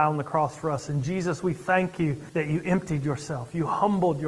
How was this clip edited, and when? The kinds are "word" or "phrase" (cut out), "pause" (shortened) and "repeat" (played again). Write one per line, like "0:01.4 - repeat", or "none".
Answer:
0:02.3 - pause